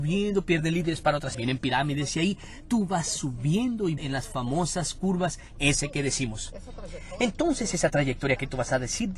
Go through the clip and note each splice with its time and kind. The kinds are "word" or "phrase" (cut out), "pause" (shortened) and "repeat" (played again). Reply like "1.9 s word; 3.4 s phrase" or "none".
1.3 s word; 4.0 s word